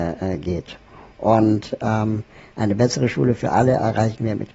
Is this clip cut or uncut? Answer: uncut